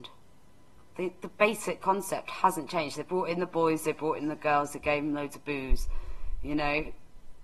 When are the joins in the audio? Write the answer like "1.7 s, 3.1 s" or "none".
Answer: none